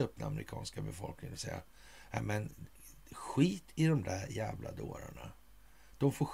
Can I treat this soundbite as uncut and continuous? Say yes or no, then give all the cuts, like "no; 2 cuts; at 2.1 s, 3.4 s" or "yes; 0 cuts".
yes; 0 cuts